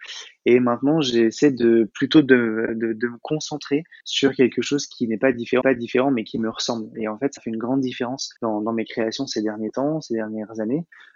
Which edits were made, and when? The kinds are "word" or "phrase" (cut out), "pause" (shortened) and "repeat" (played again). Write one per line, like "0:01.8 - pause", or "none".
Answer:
0:04.0 - pause
0:05.6 - repeat
0:07.4 - word
0:08.4 - pause